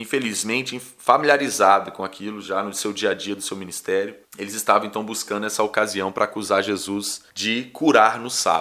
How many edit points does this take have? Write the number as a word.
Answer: two